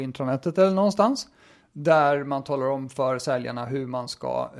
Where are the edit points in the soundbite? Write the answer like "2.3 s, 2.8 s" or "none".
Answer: none